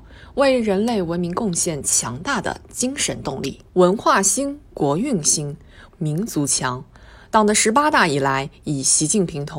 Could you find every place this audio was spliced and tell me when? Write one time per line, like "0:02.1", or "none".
0:03.7
0:05.9